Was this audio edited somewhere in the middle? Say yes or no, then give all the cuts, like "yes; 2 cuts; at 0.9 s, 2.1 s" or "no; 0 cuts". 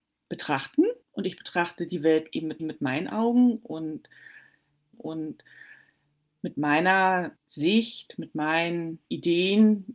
yes; 5 cuts; at 1.0 s, 2.6 s, 4.9 s, 7.4 s, 9.0 s